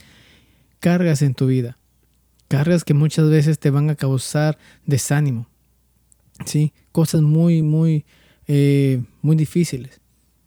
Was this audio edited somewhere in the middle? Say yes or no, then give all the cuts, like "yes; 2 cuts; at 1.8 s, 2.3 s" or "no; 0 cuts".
no; 0 cuts